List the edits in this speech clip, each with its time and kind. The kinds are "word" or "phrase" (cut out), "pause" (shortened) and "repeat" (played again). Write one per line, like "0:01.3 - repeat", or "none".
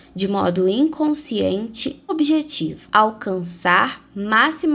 0:02.1 - word

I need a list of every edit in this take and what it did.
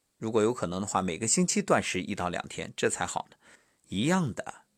0:03.6 - pause

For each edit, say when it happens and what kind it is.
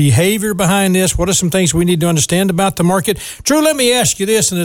none

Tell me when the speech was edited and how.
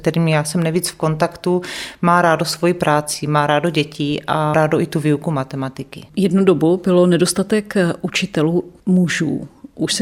0:04.5 - word
0:06.1 - pause

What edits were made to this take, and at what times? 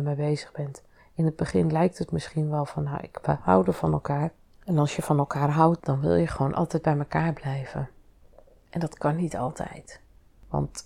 none

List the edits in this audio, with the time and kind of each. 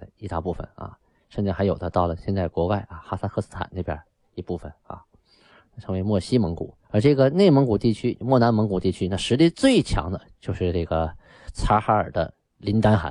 0:06.8 - pause
0:11.5 - word

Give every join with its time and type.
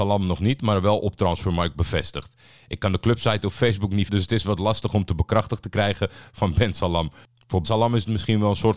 0:04.1 - word
0:07.6 - word

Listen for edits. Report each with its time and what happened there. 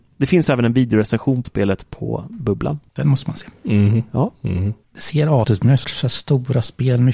0:01.4 - word
0:02.9 - pause
0:04.8 - pause
0:05.4 - word
0:05.8 - word

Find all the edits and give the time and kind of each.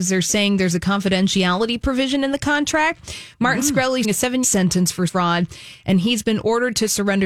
0:04.0 - word
0:04.4 - phrase
0:05.1 - word

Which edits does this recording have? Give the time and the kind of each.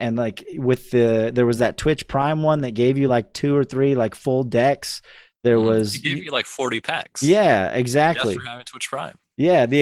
none

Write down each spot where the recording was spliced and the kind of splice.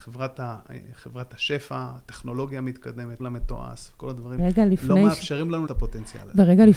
0:03.2 - word
0:04.4 - word
0:05.7 - word

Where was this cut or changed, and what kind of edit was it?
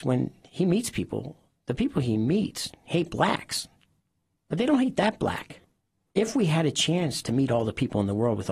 none

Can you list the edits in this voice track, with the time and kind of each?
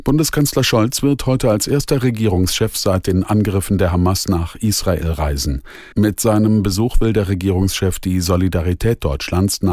0:05.9 - pause

